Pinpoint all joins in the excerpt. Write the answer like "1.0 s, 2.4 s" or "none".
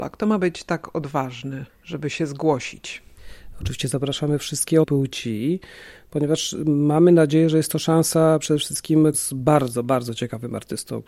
1.7 s, 4.8 s, 9.1 s